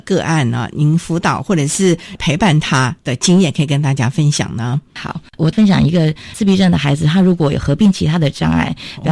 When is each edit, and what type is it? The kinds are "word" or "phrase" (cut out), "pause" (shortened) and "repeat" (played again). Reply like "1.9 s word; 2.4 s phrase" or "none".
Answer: none